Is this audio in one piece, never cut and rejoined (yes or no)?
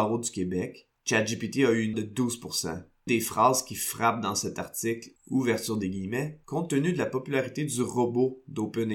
no